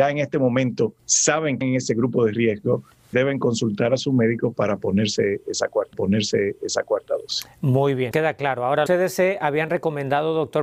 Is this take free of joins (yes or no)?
no